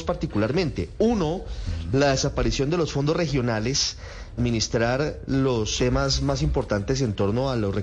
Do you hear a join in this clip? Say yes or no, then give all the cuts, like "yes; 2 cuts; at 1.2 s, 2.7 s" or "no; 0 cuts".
yes; 2 cuts; at 4.4 s, 5.8 s